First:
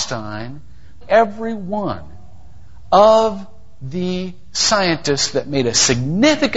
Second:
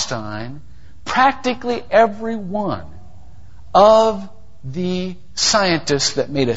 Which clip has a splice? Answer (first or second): first